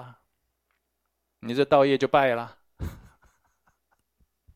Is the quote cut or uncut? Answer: uncut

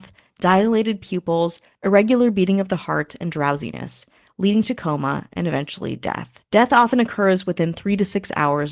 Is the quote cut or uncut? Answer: uncut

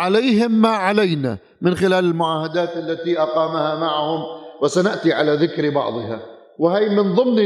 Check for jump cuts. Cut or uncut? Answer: uncut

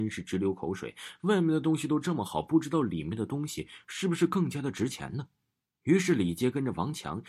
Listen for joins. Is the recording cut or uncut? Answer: uncut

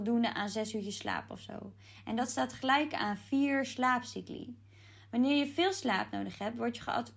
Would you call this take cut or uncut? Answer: uncut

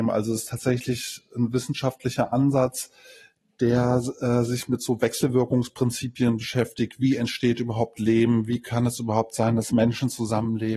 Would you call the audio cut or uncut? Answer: uncut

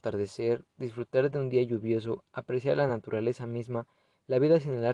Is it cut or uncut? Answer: uncut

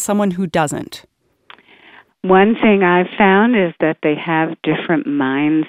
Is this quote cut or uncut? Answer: uncut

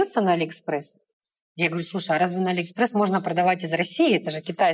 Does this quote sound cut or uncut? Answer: uncut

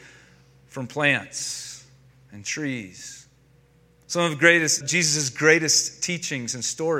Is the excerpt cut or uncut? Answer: cut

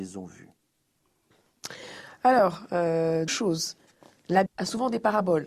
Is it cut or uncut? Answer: cut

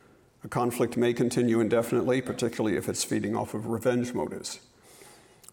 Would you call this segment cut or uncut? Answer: uncut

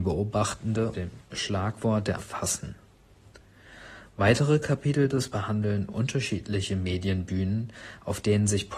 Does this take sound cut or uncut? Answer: cut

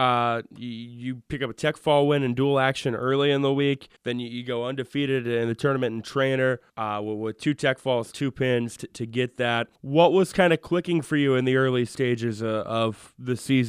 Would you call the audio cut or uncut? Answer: cut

